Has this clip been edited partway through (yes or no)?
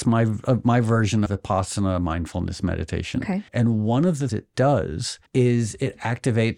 yes